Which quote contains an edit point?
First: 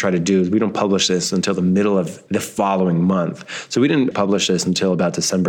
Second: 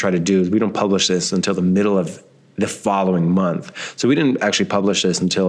first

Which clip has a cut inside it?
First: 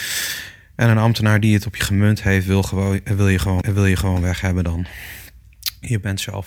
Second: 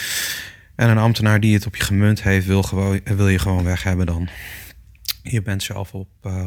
first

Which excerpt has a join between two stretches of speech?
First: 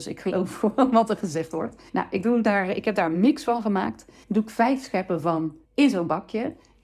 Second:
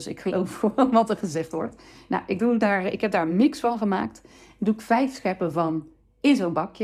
first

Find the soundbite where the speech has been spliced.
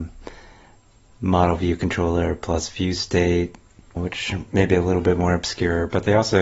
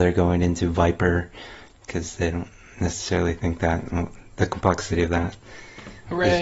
first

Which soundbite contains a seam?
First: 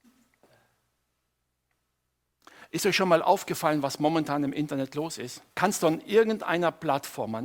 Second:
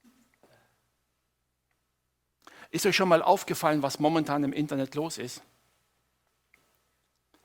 first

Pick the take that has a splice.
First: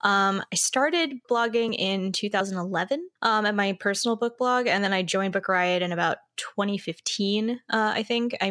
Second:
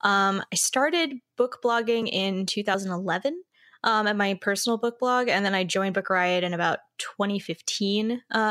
first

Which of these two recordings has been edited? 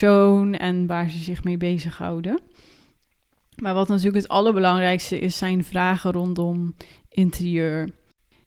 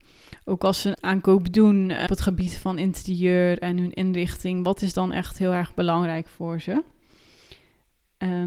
second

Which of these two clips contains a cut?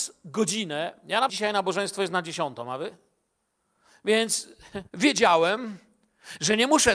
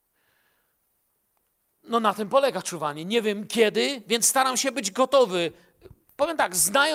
first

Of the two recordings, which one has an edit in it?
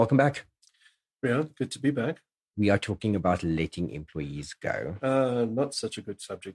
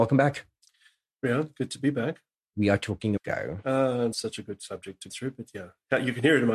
second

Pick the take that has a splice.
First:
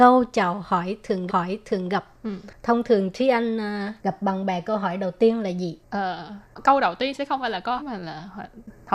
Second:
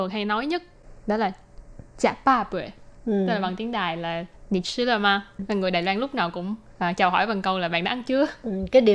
first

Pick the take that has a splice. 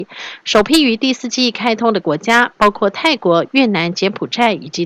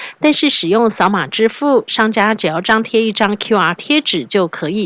second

